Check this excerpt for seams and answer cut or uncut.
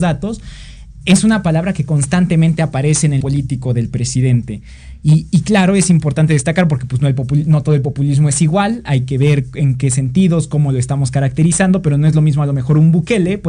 cut